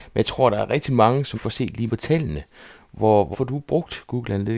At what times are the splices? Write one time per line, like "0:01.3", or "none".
0:01.3
0:01.9
0:03.3